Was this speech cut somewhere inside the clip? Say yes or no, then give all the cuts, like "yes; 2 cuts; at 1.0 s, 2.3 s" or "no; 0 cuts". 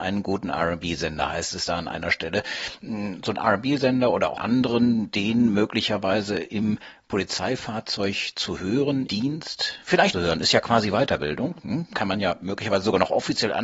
yes; 3 cuts; at 4.4 s, 9.1 s, 10.1 s